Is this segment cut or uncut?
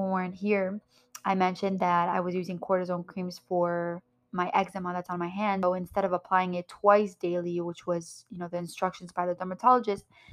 uncut